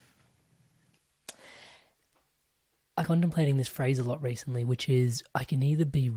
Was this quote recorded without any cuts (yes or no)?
no